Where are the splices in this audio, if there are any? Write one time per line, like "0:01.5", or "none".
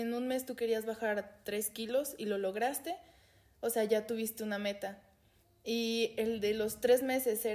none